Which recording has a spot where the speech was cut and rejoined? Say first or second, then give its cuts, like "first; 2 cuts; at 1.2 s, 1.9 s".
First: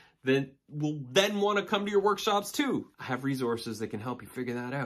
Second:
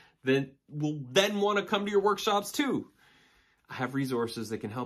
first; 1 cut; at 2.9 s